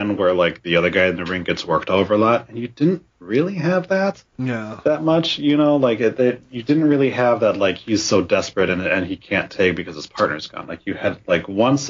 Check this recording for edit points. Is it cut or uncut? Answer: cut